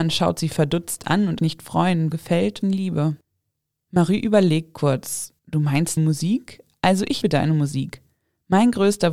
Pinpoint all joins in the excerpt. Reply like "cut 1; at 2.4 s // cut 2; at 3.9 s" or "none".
cut 1; at 1.4 s // cut 2; at 2.1 s // cut 3; at 2.6 s // cut 4; at 5.4 s // cut 5; at 6.0 s // cut 6; at 7.2 s

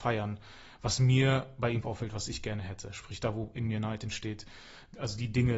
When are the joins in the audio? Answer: cut 1; at 1.8 s

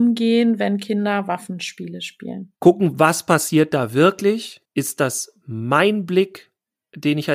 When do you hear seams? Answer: cut 1; at 2.6 s // cut 2; at 4.6 s

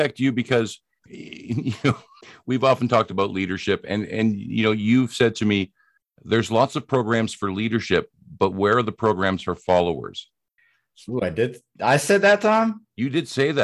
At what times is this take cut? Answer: none

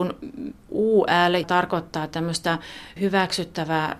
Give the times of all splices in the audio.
cut 1; at 1.4 s // cut 2; at 3.0 s

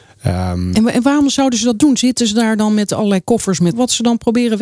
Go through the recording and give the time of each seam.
cut 1; at 3.7 s

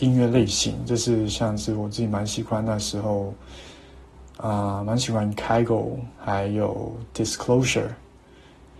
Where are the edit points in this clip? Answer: cut 1; at 6.2 s

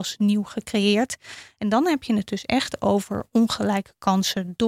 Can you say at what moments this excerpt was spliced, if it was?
none

